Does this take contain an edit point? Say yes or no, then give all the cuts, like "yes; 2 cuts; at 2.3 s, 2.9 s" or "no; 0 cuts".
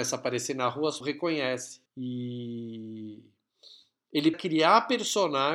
yes; 3 cuts; at 1.0 s, 1.9 s, 4.3 s